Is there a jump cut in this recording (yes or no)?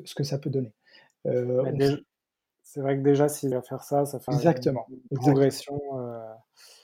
yes